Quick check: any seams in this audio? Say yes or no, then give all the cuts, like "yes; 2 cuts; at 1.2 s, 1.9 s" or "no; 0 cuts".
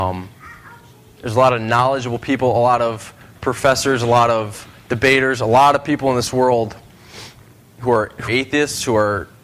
yes; 1 cut; at 8.3 s